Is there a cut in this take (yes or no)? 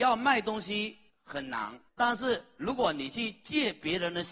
yes